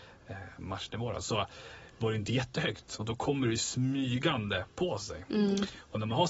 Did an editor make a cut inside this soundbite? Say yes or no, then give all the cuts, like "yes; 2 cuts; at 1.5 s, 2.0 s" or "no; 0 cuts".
no; 0 cuts